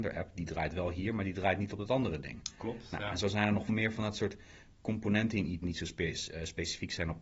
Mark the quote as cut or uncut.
cut